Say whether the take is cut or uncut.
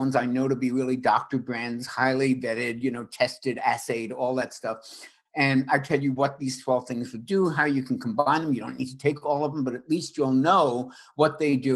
uncut